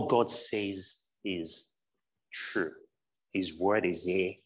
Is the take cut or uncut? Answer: uncut